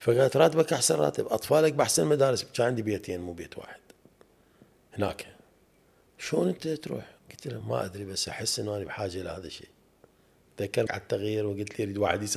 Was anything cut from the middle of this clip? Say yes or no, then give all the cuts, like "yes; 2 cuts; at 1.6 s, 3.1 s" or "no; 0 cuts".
yes; 3 cuts; at 7.2 s, 7.6 s, 10.9 s